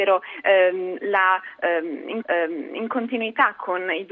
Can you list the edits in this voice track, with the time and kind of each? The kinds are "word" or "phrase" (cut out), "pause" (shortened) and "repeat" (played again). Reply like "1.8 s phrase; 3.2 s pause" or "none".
2.2 s repeat